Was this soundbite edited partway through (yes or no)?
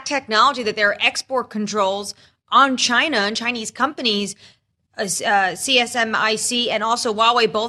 no